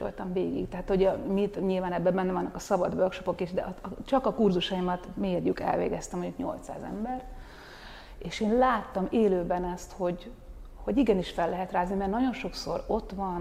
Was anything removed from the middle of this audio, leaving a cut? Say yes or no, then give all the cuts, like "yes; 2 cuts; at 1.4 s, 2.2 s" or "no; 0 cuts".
no; 0 cuts